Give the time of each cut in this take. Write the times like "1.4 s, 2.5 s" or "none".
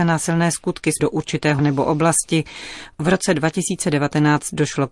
1.0 s, 1.6 s